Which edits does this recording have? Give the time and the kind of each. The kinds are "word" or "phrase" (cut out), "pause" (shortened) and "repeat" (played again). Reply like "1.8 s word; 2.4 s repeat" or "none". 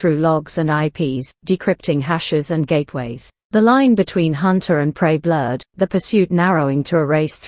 3.4 s pause